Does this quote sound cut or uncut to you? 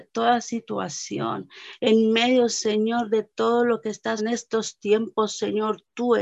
cut